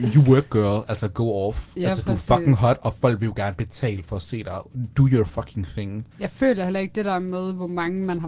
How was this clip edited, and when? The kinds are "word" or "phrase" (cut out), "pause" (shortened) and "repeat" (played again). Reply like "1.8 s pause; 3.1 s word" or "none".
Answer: 6.1 s pause